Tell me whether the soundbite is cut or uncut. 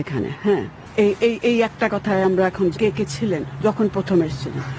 cut